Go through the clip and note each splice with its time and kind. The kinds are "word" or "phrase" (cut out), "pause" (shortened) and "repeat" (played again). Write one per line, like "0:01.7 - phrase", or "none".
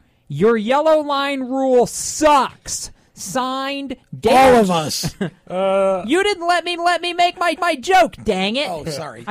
0:06.8 - repeat
0:07.6 - repeat